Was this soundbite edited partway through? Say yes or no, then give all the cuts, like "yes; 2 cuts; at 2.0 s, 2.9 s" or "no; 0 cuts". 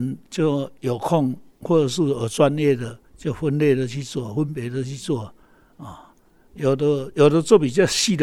yes; 1 cut; at 3.1 s